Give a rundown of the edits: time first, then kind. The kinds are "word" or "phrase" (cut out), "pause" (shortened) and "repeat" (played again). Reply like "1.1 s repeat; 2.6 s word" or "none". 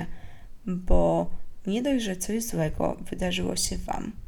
none